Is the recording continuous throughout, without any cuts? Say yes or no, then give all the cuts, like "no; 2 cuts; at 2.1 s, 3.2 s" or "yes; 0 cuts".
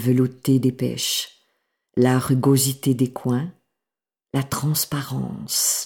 yes; 0 cuts